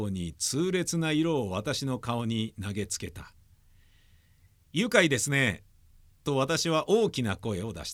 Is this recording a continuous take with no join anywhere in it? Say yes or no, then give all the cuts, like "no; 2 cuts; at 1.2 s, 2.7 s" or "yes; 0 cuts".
yes; 0 cuts